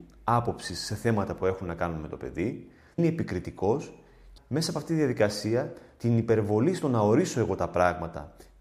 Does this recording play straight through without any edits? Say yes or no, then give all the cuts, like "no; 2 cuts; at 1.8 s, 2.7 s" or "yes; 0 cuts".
no; 2 cuts; at 3.0 s, 4.4 s